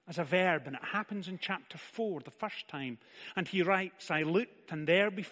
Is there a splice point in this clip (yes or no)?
no